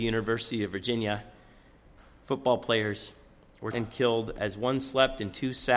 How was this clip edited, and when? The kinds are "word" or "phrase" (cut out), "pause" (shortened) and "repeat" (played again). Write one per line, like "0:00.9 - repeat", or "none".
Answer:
0:03.7 - word